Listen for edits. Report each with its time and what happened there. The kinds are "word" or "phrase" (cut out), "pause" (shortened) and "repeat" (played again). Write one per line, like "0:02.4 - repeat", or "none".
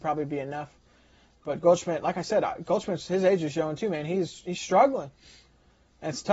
none